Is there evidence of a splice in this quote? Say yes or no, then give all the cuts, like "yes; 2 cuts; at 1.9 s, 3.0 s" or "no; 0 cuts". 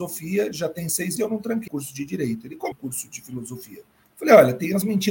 yes; 4 cuts; at 1.2 s, 1.7 s, 2.7 s, 4.0 s